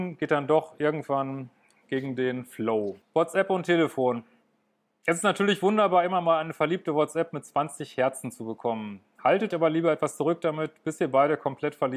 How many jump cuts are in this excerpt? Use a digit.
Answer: 2